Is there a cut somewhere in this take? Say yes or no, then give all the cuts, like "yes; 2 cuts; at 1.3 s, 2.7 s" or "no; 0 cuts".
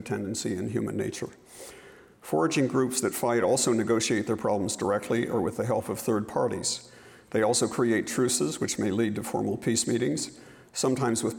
no; 0 cuts